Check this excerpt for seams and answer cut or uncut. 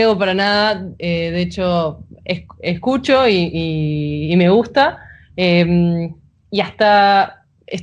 uncut